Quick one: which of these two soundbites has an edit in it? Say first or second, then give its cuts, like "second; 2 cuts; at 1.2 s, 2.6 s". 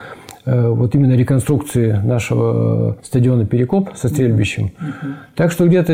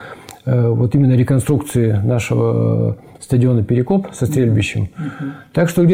first; 1 cut; at 3.0 s